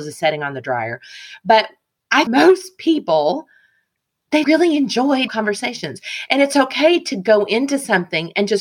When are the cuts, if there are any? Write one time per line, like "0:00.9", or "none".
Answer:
0:02.3
0:04.4
0:05.3